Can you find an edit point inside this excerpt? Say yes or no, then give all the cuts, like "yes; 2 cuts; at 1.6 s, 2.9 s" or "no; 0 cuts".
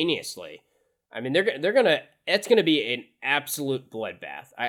no; 0 cuts